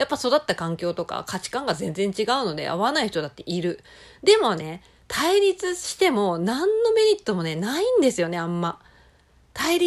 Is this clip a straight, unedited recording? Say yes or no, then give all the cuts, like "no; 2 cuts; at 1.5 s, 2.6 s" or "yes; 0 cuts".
yes; 0 cuts